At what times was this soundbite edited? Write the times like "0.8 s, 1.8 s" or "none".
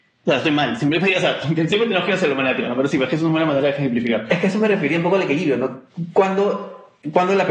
none